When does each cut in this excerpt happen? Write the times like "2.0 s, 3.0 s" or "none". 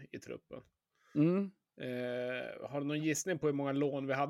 none